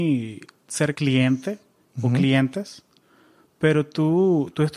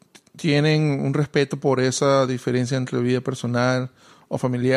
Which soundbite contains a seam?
first; 1 cut; at 0.9 s

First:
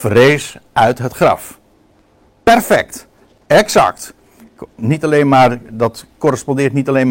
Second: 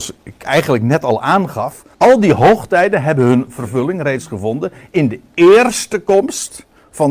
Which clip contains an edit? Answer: second; 1 cut; at 1.9 s

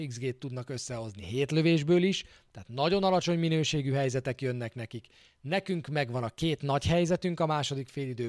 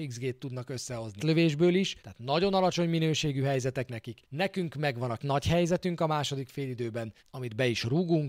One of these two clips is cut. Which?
second; 6 cuts; at 1.2 s, 2.0 s, 3.9 s, 4.2 s, 5.2 s, 7.2 s

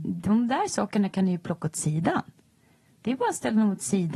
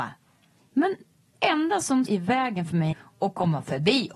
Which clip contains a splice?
second; 3 cuts; at 1.3 s, 2.1 s, 2.9 s

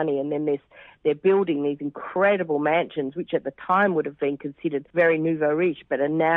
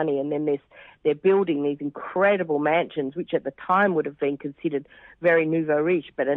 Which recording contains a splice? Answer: first; 1 cut; at 4.9 s

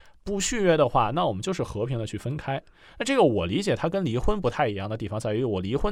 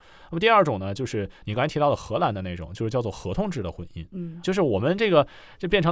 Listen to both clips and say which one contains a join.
second; 1 cut; at 4.4 s

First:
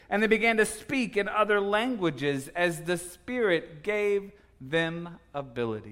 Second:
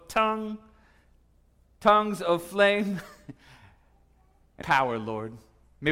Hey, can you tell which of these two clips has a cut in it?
second; 1 cut; at 4.6 s

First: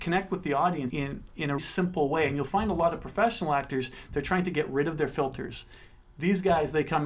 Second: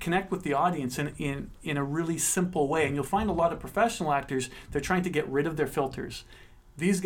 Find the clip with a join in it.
first; 2 cuts; at 0.9 s, 1.6 s

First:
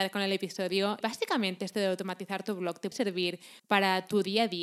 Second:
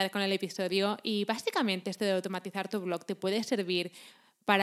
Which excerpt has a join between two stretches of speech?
first; 3 cuts; at 1.0 s, 2.9 s, 3.6 s

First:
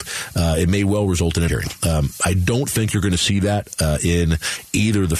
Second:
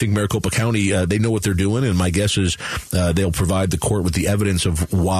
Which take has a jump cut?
first; 1 cut; at 1.5 s

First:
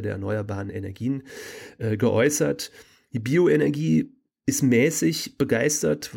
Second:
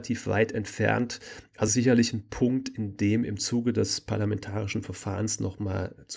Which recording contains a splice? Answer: second; 1 cut; at 1.7 s

